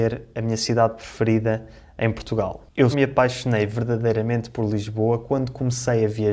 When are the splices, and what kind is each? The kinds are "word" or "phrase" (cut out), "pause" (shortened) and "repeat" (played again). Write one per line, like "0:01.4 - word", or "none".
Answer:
0:02.9 - word